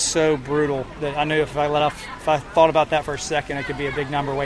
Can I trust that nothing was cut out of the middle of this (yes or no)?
yes